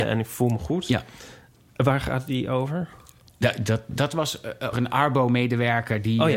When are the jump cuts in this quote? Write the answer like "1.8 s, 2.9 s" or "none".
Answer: 4.7 s